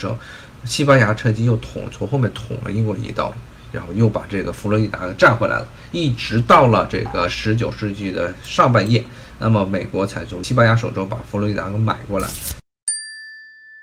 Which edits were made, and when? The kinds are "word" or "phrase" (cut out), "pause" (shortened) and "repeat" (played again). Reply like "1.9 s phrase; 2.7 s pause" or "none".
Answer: none